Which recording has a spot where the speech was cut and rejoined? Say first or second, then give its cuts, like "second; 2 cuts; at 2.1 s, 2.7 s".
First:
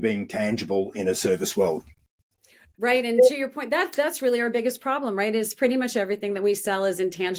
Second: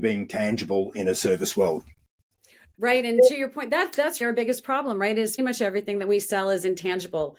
second; 2 cuts; at 4.2 s, 5.4 s